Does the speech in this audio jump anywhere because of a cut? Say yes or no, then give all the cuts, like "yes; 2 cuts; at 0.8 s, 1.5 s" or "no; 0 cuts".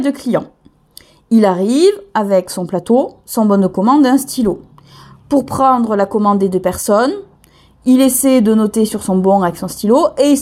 no; 0 cuts